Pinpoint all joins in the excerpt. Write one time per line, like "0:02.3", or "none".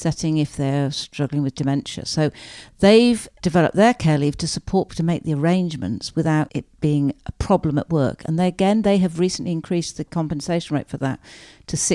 0:03.4
0:04.9